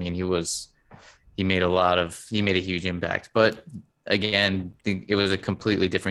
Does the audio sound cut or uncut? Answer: uncut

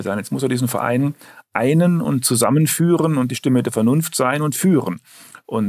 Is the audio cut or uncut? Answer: uncut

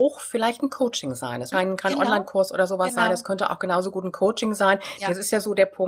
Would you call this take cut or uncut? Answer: cut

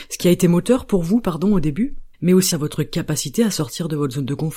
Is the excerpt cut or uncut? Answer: cut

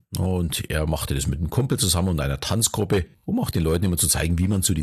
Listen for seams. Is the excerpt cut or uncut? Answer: cut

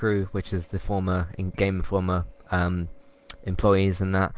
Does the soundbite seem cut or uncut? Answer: cut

